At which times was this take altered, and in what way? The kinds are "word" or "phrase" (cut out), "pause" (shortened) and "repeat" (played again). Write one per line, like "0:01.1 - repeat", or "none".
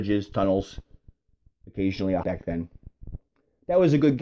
0:02.2 - phrase